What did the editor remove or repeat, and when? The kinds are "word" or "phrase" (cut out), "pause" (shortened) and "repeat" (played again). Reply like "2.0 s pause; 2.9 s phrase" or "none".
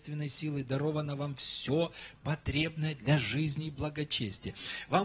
none